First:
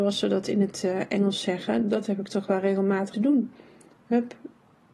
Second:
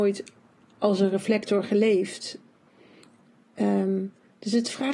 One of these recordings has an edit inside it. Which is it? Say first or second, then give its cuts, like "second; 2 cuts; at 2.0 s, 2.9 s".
first; 1 cut; at 3.1 s